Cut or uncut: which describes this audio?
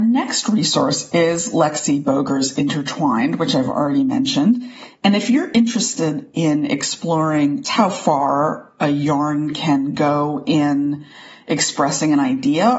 cut